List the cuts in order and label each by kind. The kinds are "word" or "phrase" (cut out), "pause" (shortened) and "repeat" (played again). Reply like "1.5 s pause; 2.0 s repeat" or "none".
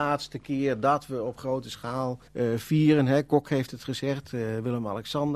2.3 s pause